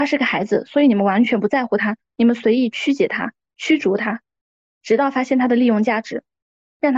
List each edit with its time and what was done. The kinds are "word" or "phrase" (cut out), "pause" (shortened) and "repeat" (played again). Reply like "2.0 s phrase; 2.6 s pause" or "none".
none